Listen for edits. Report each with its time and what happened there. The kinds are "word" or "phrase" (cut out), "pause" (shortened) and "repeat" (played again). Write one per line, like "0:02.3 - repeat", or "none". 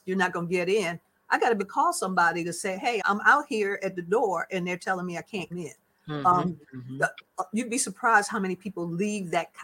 0:01.6 - word
0:03.0 - word
0:05.5 - word